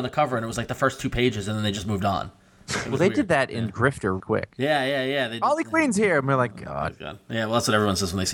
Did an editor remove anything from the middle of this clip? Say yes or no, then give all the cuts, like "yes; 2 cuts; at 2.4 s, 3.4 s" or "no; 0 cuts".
yes; 2 cuts; at 4.2 s, 6.5 s